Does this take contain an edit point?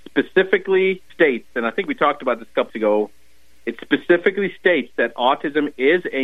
yes; 2 cuts; at 1.1 s, 2.7 s

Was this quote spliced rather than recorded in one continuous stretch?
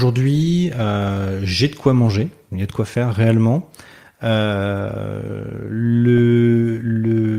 no; 0 cuts

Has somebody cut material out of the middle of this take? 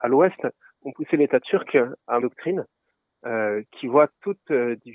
yes; 1 cut; at 2.2 s

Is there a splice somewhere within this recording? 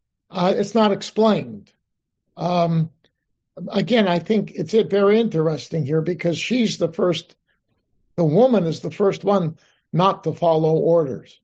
no; 0 cuts

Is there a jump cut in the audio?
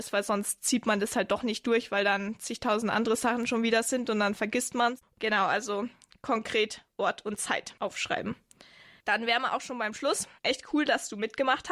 yes; 1 cut; at 10.4 s

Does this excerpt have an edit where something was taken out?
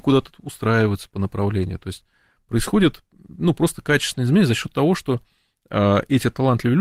no; 0 cuts

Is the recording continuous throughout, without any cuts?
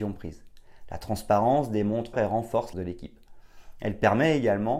no; 2 cuts; at 2.1 s, 2.7 s

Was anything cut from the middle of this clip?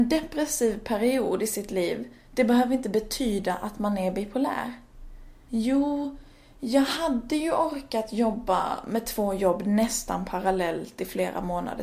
no; 0 cuts

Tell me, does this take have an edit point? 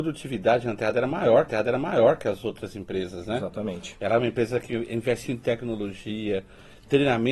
yes; 2 cuts; at 1.5 s, 5.3 s

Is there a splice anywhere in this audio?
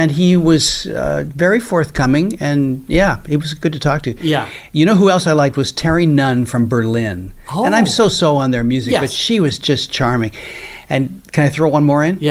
no; 0 cuts

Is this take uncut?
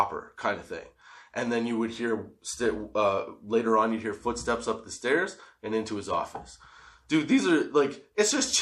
yes; 0 cuts

